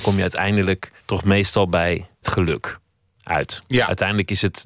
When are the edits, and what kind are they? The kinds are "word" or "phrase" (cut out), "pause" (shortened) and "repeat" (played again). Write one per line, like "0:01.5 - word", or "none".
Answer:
0:01.0 - pause
0:02.2 - word